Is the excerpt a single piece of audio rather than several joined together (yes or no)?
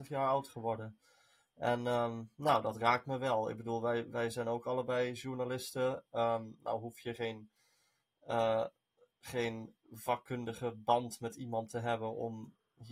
yes